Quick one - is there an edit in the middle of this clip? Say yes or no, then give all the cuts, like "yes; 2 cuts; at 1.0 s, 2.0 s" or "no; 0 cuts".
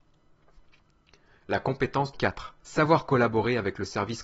yes; 2 cuts; at 2.1 s, 2.6 s